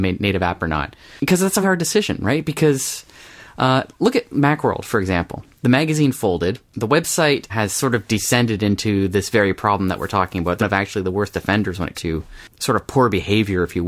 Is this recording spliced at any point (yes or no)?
yes